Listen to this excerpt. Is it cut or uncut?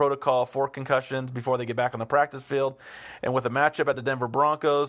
uncut